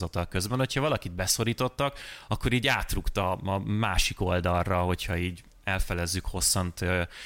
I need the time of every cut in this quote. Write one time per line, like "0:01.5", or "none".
none